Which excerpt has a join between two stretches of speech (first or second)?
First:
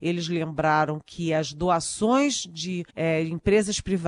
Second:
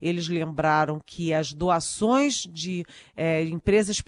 first